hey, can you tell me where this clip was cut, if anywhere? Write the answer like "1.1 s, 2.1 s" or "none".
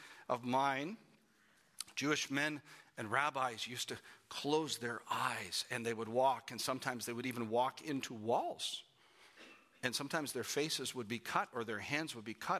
none